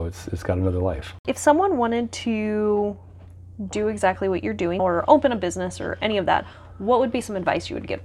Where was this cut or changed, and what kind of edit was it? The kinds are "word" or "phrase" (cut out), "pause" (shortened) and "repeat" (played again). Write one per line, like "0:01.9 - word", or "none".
0:04.8 - word

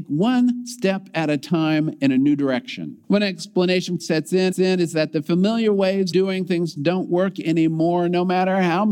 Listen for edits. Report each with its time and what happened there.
0:03.0 - pause
0:04.0 - phrase
0:04.5 - repeat
0:06.1 - word
0:06.8 - word

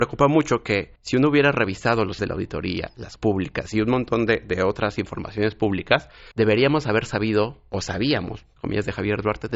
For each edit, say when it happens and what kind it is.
0:01.0 - pause
0:02.2 - word
0:03.2 - word
0:06.3 - pause
0:08.6 - word

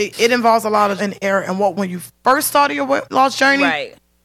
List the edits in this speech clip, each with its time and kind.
0:01.0 - word
0:01.7 - word
0:03.1 - word

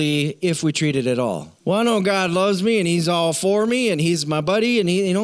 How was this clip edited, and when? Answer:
0:01.6 - pause

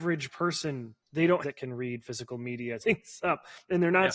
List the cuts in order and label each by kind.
0:01.0 - pause
0:01.4 - phrase
0:02.8 - word

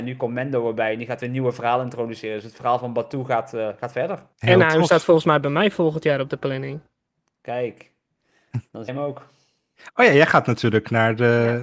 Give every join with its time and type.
0:04.3 - pause
0:08.9 - word

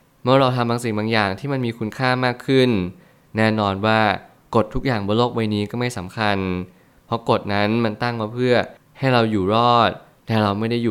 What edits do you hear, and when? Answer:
none

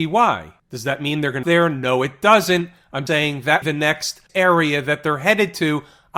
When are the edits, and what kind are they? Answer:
0:01.4 - phrase
0:03.1 - word
0:03.6 - phrase
0:04.3 - word

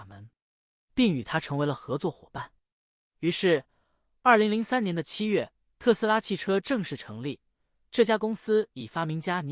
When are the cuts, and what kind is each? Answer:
none

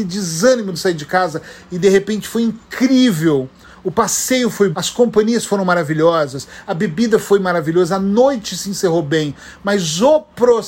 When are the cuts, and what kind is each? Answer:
0:04.7 - word

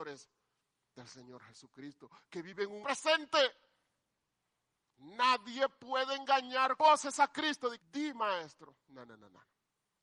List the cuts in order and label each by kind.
0:00.9 - word
0:02.8 - word
0:06.8 - word
0:07.8 - word

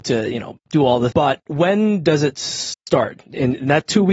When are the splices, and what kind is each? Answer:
0:01.1 - word

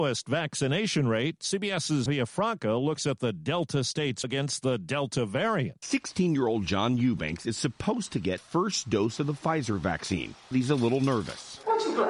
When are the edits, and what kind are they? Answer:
0:02.1 - word
0:04.2 - word
0:08.4 - word
0:10.5 - word

